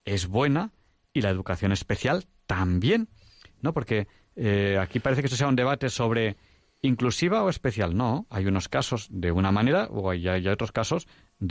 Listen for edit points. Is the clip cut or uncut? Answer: uncut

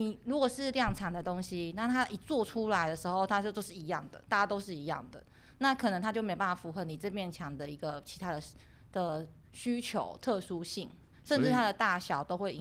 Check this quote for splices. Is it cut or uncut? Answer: cut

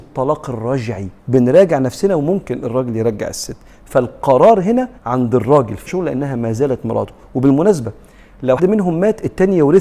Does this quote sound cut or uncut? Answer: cut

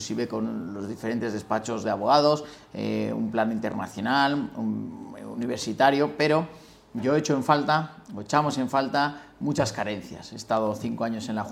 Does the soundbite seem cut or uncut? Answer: uncut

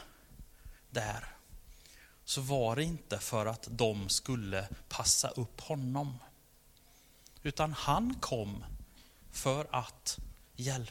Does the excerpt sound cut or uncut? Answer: uncut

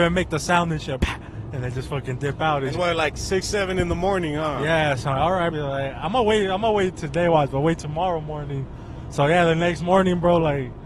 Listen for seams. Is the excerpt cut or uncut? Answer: cut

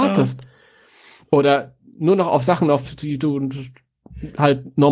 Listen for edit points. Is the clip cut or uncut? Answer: uncut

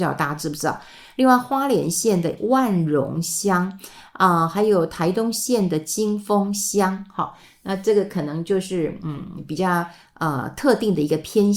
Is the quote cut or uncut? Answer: uncut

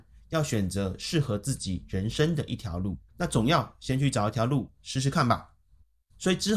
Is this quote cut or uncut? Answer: cut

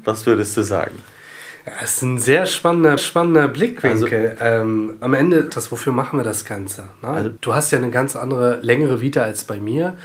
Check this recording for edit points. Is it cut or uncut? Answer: cut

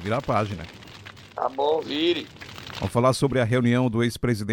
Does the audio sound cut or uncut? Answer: uncut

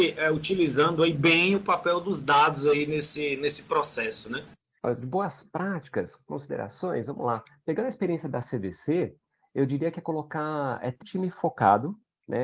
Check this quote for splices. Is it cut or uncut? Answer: cut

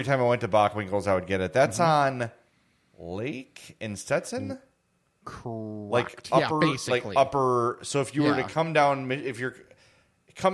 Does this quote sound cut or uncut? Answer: uncut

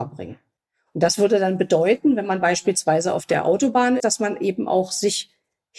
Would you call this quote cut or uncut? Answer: cut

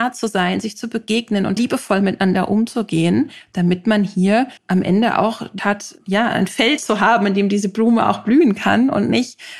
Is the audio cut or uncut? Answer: cut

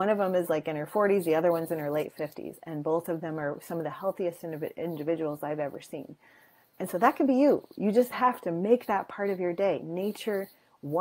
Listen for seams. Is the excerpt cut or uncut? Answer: uncut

